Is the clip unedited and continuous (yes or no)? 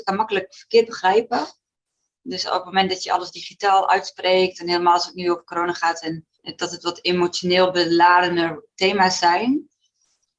no